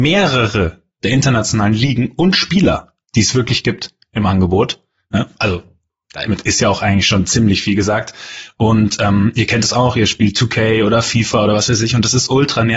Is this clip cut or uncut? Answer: uncut